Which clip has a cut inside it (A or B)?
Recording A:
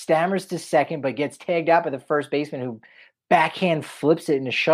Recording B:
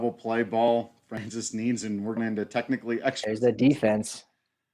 B